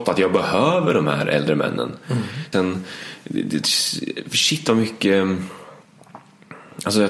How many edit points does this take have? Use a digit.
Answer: 1